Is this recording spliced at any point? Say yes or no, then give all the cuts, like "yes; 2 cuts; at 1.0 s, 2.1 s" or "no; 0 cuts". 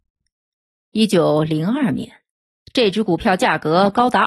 no; 0 cuts